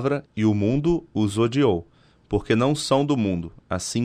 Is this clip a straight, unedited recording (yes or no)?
yes